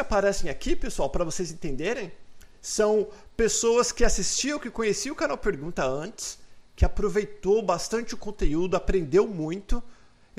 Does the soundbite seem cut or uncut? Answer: uncut